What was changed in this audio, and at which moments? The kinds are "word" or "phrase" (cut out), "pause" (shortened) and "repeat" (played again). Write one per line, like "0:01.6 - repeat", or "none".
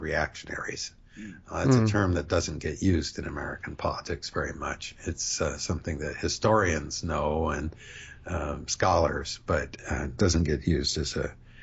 none